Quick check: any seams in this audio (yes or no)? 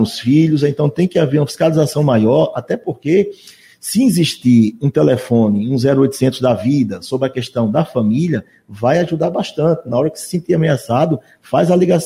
no